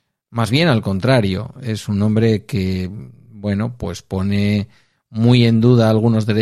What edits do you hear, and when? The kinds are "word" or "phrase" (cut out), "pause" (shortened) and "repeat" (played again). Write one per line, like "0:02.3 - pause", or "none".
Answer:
none